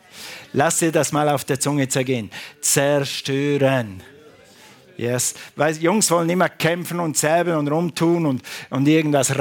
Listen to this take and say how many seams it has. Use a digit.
0